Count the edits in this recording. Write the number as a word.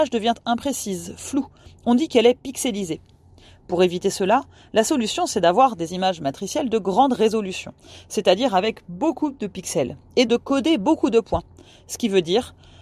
one